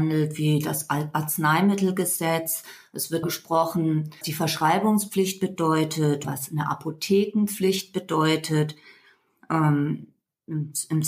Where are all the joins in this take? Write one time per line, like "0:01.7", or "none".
0:03.2
0:04.2
0:06.2